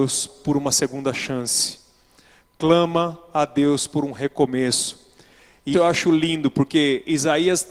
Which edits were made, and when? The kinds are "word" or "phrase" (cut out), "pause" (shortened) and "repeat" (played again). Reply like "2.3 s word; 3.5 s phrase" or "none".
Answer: 5.7 s word